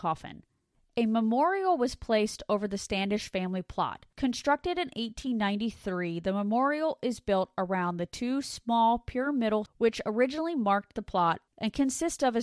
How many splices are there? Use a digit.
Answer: 1